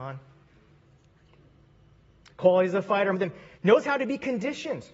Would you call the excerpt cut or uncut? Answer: cut